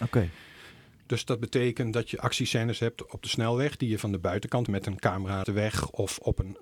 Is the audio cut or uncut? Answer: cut